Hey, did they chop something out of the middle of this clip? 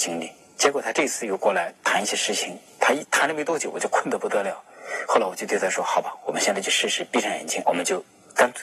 yes; 1 cut; at 7.6 s

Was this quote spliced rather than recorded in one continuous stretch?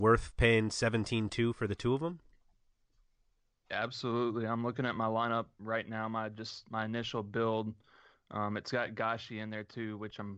no; 0 cuts

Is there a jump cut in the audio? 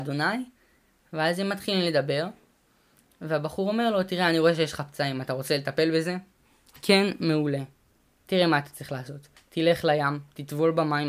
no; 0 cuts

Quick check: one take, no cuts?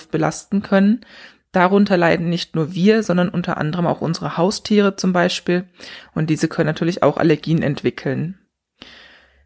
yes; 0 cuts

